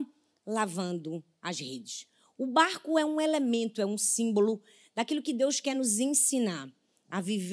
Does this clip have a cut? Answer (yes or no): no